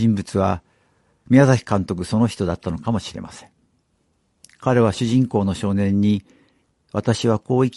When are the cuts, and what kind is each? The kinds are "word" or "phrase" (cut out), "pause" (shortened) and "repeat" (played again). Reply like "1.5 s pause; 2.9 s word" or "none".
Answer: none